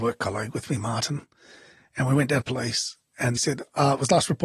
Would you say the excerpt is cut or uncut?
cut